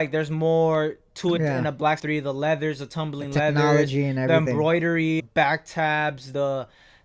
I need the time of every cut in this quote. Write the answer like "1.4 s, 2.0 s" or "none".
1.4 s, 2.0 s, 5.2 s